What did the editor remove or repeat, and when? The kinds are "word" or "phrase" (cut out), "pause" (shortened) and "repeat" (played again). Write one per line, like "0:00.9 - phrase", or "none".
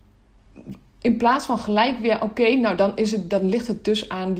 none